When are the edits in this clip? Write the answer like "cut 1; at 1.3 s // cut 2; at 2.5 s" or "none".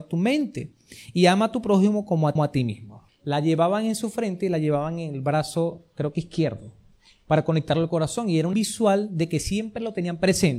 cut 1; at 2.4 s // cut 2; at 3.1 s // cut 3; at 6.9 s // cut 4; at 8.5 s